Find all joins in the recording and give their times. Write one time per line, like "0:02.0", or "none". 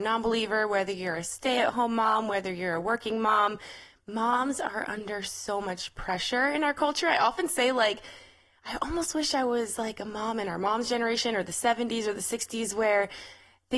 none